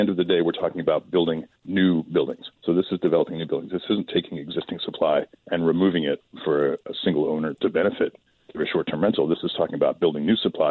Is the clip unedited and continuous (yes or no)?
no